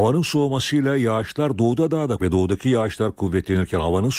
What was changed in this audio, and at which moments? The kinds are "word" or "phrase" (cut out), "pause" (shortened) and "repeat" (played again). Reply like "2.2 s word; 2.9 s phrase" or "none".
2.2 s word